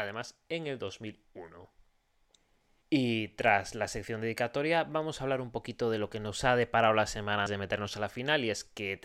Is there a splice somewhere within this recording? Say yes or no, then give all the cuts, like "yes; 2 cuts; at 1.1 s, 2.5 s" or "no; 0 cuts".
yes; 1 cut; at 7.5 s